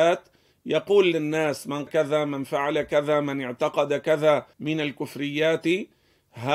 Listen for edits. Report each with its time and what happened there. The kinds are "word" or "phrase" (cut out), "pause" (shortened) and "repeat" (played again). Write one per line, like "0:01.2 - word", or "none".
0:01.9 - word
0:04.5 - pause